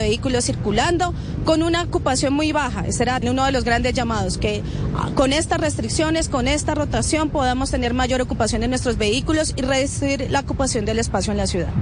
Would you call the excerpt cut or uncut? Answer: cut